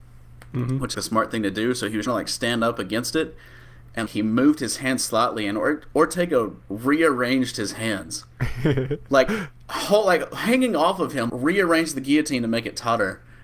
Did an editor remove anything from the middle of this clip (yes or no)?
yes